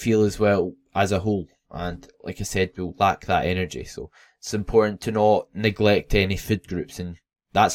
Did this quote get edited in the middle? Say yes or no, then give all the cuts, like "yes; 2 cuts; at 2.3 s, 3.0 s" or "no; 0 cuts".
no; 0 cuts